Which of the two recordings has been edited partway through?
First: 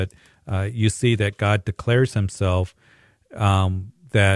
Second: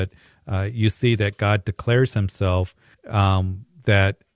second; 1 cut; at 2.9 s

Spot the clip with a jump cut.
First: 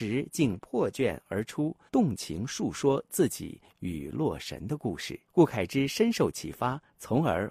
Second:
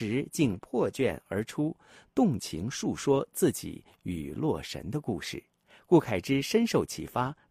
first; 2 cuts; at 1.9 s, 5.3 s

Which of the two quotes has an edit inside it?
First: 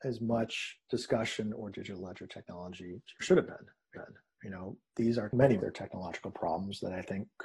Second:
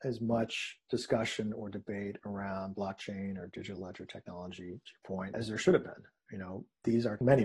first; 4 cuts; at 1.7 s, 3.2 s, 3.9 s, 5.6 s

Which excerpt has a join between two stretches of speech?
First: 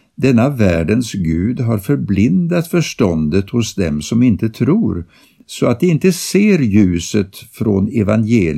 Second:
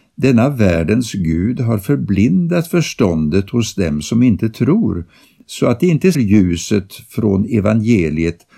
second; 1 cut; at 6.1 s

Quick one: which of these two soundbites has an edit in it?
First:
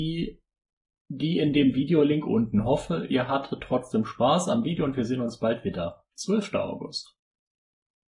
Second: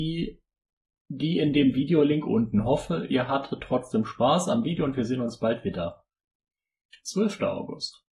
first; 1 cut; at 6.1 s

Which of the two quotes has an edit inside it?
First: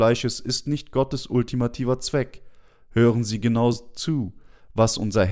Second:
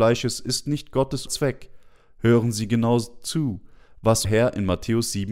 second; 2 cuts; at 1.3 s, 4.2 s

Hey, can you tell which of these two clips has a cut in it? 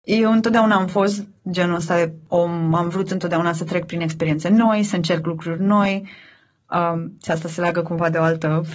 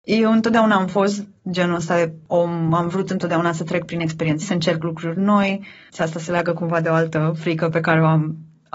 second; 2 cuts; at 4.4 s, 5.9 s

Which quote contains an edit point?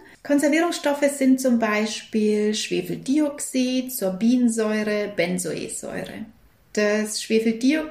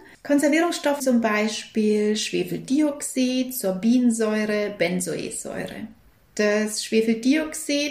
second; 1 cut; at 1.0 s

